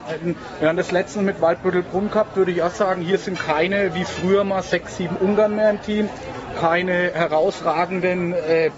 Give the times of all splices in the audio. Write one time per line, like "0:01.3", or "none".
none